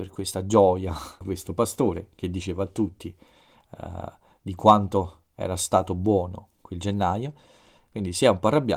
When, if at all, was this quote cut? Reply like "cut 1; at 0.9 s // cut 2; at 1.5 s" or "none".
cut 1; at 1.2 s